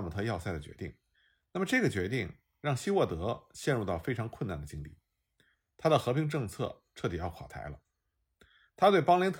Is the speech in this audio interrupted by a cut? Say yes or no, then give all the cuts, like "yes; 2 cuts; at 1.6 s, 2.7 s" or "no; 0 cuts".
yes; 1 cut; at 1.1 s